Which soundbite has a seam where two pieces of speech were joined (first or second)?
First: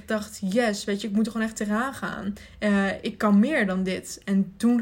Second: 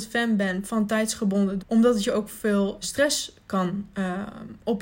second